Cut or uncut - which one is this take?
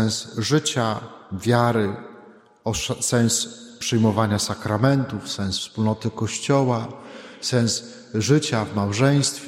uncut